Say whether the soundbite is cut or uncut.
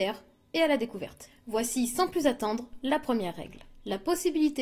uncut